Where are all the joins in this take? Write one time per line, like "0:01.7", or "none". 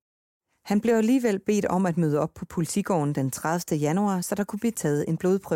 none